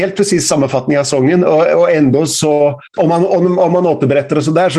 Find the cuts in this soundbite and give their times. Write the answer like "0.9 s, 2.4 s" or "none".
2.9 s